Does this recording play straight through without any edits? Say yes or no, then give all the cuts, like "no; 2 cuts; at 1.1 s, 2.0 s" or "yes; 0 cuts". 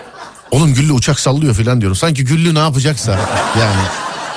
yes; 0 cuts